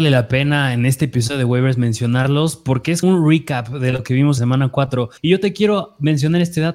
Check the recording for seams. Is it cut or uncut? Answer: cut